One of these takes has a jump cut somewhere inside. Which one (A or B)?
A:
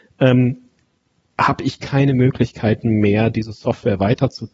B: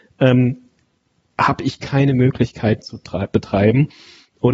B